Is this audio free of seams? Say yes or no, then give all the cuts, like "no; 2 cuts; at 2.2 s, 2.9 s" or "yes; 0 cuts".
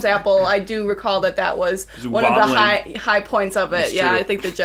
yes; 0 cuts